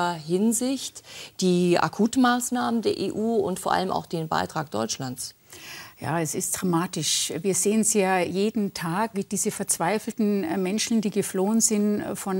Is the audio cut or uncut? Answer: cut